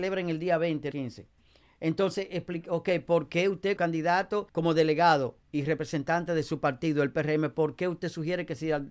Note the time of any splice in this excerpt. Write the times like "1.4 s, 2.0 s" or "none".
0.9 s, 3.8 s, 4.5 s